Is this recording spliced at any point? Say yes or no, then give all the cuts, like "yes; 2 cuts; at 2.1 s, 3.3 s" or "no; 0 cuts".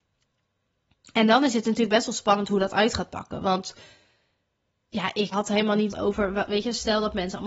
yes; 2 cuts; at 5.3 s, 5.9 s